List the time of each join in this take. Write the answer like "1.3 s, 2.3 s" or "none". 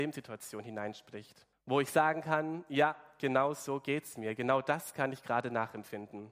1.5 s